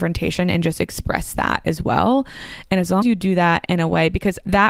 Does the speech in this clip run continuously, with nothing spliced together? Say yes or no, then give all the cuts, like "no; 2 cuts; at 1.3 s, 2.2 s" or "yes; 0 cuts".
no; 1 cut; at 3.0 s